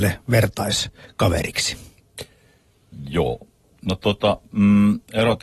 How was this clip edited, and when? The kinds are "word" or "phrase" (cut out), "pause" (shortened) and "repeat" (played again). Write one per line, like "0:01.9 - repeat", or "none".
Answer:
none